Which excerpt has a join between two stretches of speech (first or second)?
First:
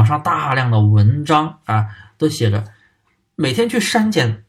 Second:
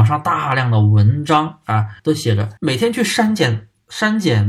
second